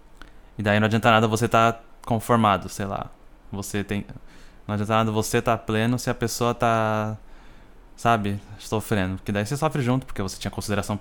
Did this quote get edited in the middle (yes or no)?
no